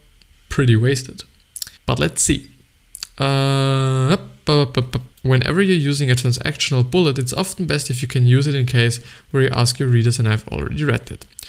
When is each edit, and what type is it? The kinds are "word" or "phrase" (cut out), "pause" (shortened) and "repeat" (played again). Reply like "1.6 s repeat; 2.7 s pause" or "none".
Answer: 1.8 s pause; 5.1 s pause